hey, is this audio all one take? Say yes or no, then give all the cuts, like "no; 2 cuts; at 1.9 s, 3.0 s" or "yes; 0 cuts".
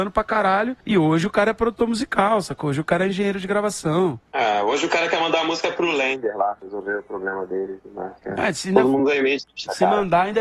yes; 0 cuts